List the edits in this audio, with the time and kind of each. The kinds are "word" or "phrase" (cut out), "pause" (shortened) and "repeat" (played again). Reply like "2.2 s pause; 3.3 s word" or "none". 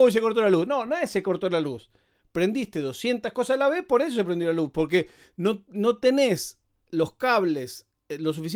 none